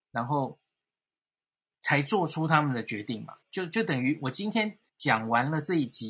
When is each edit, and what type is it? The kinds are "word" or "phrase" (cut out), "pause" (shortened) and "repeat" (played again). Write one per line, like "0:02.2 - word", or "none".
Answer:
0:03.4 - pause
0:04.9 - pause